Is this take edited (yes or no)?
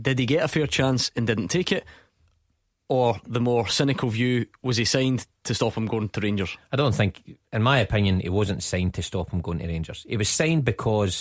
no